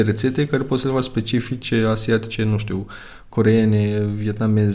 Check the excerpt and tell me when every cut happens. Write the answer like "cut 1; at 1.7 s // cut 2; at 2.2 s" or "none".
none